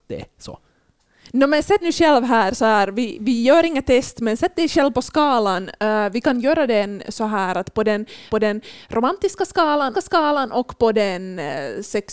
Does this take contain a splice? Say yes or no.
yes